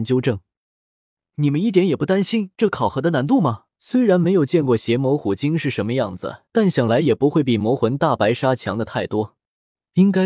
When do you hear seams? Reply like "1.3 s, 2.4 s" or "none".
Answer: 3.7 s, 6.5 s